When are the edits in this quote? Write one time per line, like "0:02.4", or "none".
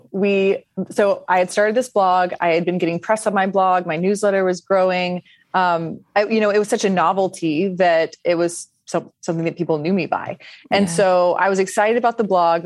0:06.1